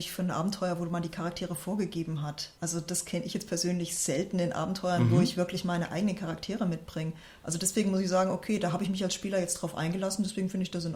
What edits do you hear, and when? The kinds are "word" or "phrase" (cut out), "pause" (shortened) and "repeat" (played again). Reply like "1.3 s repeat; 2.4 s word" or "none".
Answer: none